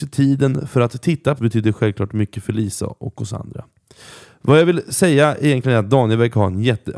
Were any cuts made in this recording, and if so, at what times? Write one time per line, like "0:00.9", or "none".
0:01.4